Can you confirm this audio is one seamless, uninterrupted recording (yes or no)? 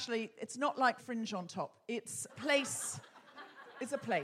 no